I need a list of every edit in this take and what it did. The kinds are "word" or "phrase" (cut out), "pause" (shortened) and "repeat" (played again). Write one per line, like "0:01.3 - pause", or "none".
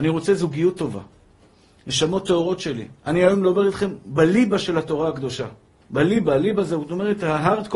0:03.0 - pause